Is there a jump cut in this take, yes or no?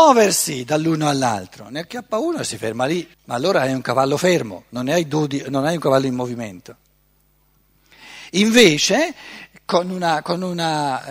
yes